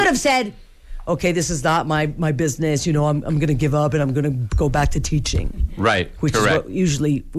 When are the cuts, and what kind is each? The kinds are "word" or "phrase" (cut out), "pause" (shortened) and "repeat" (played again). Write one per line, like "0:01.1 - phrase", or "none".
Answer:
none